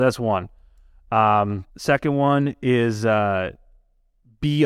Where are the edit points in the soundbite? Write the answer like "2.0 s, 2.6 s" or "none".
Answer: 1.7 s